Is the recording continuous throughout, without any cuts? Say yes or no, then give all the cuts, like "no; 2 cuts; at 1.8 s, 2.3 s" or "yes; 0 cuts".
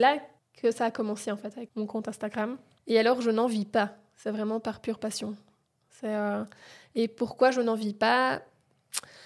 no; 1 cut; at 1.7 s